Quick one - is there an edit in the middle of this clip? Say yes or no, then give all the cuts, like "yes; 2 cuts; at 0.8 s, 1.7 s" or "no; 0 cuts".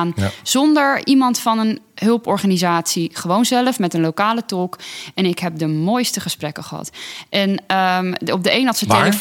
no; 0 cuts